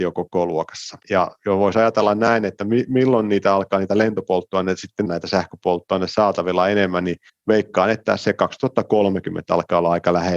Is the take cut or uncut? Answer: cut